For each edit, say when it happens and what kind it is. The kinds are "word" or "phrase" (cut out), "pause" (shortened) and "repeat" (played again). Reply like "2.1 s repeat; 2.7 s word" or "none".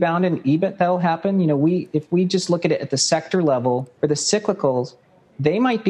4.0 s pause